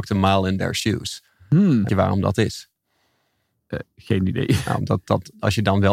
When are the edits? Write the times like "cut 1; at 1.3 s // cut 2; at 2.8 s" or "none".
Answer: cut 1; at 1.9 s